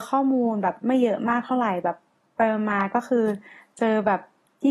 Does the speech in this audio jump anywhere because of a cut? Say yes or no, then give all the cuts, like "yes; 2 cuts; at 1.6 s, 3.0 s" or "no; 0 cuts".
no; 0 cuts